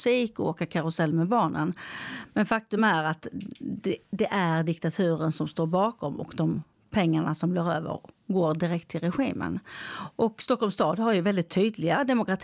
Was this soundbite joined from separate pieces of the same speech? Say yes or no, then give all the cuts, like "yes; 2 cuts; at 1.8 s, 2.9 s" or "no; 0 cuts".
no; 0 cuts